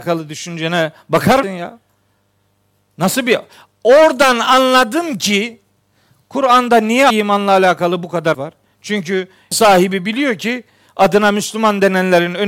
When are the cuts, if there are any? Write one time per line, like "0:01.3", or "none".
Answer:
0:01.4
0:07.1
0:08.3
0:09.5